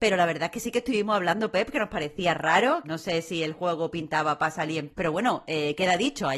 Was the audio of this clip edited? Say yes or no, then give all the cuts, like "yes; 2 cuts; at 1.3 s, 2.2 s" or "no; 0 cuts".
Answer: yes; 2 cuts; at 2.8 s, 4.9 s